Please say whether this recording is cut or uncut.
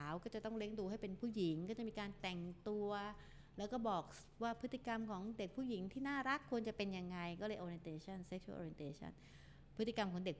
uncut